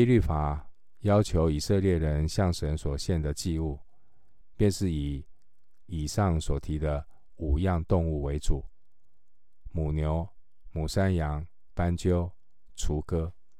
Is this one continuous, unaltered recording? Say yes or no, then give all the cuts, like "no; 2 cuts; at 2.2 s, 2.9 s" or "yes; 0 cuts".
no; 1 cut; at 11.7 s